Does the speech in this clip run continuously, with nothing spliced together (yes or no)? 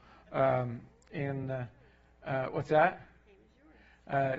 yes